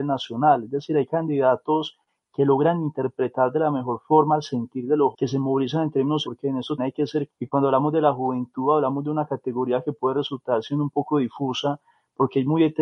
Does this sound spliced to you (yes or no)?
yes